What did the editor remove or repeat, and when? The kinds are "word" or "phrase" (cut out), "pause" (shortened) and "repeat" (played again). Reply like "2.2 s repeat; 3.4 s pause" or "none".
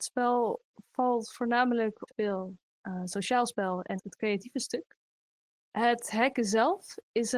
2.1 s phrase; 4.0 s word; 5.5 s pause